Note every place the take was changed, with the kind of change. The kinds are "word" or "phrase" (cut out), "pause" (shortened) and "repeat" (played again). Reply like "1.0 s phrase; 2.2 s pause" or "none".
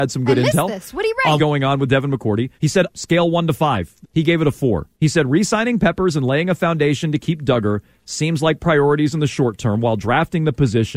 1.4 s phrase; 2.6 s pause; 2.9 s phrase; 4.0 s phrase; 4.9 s pause